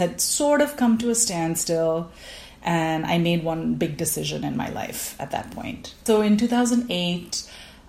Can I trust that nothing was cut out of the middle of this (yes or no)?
yes